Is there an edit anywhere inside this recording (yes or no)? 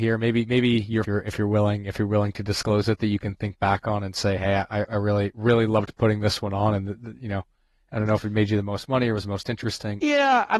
yes